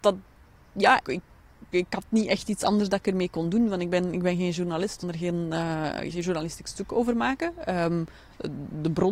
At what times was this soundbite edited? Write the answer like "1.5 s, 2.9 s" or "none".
1.0 s, 5.0 s, 6.1 s